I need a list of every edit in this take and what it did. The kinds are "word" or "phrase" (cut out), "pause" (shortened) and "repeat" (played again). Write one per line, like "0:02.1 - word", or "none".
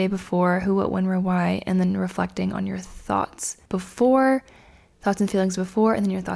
0:03.7 - pause